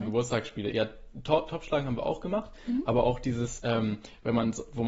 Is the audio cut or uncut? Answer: uncut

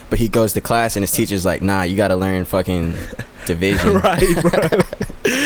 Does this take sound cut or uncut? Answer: uncut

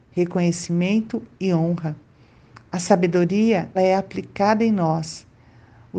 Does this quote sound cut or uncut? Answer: cut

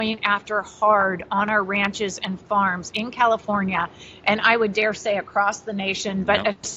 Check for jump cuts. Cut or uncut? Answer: uncut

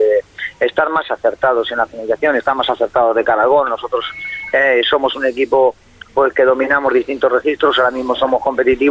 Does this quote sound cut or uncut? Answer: uncut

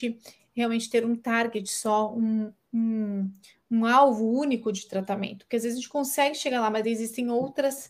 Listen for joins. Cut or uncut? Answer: uncut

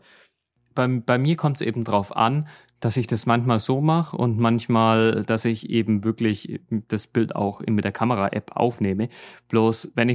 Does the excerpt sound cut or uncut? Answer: uncut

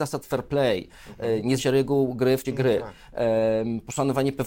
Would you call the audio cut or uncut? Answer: cut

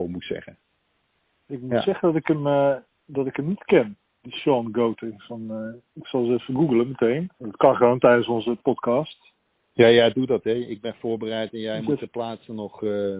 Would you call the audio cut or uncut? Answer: cut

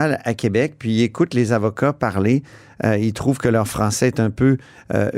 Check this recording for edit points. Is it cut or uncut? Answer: uncut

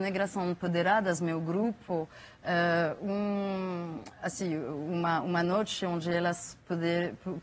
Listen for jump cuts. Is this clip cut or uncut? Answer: uncut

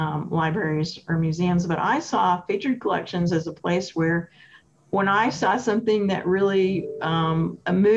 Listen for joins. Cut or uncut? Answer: uncut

